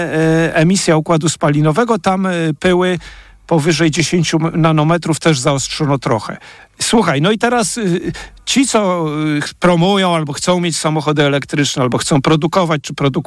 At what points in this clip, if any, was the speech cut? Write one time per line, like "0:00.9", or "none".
0:06.6